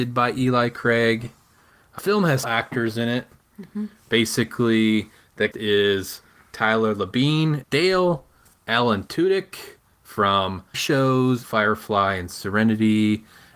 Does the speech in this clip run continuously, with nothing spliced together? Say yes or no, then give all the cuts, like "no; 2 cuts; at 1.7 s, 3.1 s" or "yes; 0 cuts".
no; 6 cuts; at 2.0 s, 2.4 s, 5.5 s, 7.6 s, 10.7 s, 11.4 s